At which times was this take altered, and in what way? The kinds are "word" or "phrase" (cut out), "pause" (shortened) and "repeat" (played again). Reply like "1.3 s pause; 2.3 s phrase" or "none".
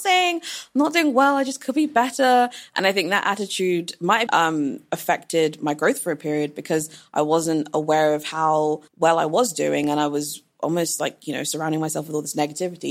4.3 s word; 8.9 s pause